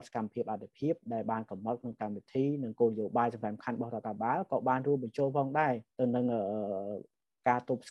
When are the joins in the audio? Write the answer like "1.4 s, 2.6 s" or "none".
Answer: 5.9 s